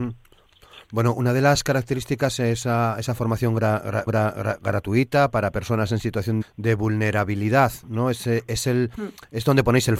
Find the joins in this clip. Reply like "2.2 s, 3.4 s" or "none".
4.1 s, 6.4 s